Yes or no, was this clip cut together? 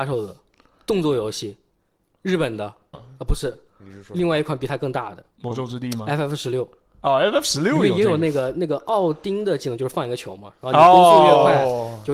yes